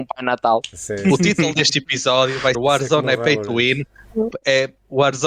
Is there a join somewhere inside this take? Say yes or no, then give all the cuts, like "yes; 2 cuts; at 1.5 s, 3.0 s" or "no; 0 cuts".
yes; 1 cut; at 2.5 s